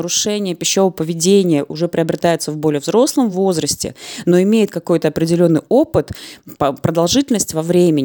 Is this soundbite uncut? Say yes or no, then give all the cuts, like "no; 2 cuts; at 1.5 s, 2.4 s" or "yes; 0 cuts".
yes; 0 cuts